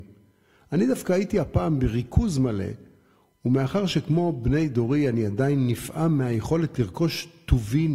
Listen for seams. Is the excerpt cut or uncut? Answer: uncut